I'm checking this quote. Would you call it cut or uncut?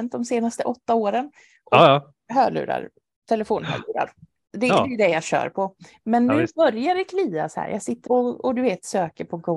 cut